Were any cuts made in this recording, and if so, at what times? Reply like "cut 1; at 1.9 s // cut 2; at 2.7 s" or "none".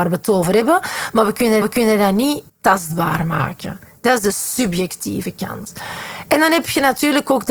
cut 1; at 1.6 s // cut 2; at 2.5 s